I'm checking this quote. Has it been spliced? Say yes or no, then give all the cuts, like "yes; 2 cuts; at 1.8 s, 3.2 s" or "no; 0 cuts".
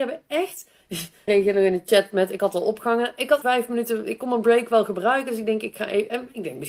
yes; 2 cuts; at 1.3 s, 3.4 s